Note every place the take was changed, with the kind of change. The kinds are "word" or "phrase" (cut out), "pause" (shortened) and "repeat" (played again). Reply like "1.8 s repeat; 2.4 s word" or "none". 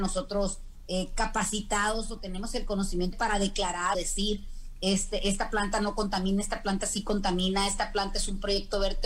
3.1 s word; 3.9 s word